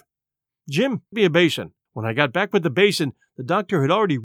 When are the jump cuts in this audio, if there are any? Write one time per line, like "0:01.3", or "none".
0:01.1
0:01.9